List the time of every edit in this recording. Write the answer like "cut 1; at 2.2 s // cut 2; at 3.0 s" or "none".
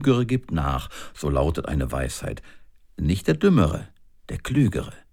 none